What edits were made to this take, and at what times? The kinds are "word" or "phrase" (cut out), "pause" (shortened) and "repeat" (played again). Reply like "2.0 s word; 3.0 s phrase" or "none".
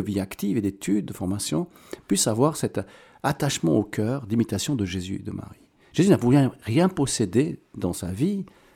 none